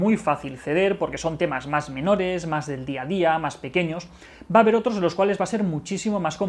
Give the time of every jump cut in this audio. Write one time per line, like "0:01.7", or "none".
none